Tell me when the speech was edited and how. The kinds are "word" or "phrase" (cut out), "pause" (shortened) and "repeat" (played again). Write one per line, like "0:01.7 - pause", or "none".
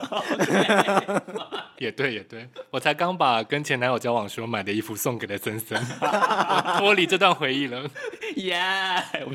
0:01.8 - word